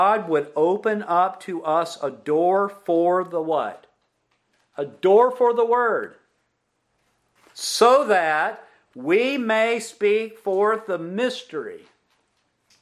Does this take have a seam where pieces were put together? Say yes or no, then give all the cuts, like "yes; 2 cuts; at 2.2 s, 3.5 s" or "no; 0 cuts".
no; 0 cuts